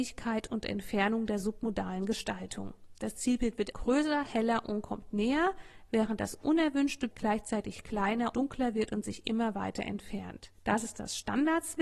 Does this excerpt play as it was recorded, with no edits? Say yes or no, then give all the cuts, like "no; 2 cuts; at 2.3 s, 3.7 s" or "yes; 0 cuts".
no; 4 cuts; at 3.7 s, 7.1 s, 8.3 s, 10.5 s